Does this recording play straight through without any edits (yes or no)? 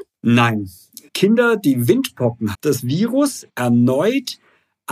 no